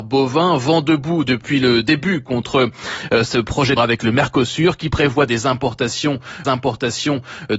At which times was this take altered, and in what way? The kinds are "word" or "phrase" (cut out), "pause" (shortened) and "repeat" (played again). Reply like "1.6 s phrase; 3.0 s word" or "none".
3.8 s word; 6.4 s repeat